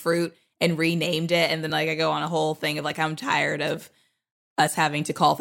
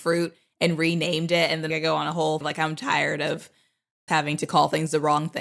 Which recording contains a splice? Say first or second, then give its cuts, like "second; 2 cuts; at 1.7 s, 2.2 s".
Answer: second; 3 cuts; at 1.7 s, 2.4 s, 4.1 s